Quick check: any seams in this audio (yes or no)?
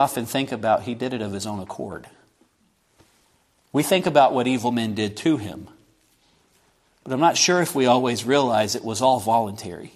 no